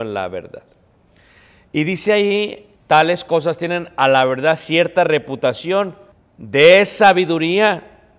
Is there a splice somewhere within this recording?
yes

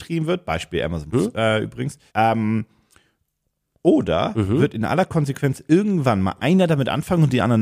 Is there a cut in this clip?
yes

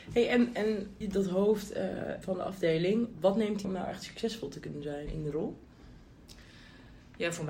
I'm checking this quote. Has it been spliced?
yes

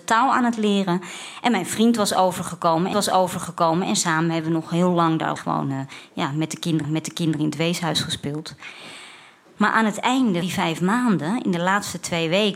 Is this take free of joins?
no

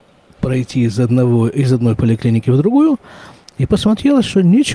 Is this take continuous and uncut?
yes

